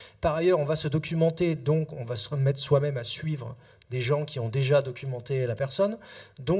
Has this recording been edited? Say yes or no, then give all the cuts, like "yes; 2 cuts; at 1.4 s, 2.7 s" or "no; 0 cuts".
no; 0 cuts